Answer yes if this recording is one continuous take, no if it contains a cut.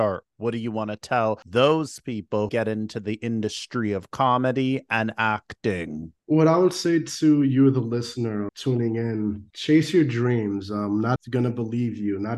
no